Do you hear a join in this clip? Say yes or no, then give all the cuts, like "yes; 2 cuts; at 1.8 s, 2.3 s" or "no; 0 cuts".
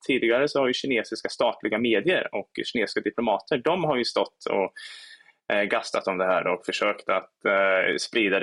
no; 0 cuts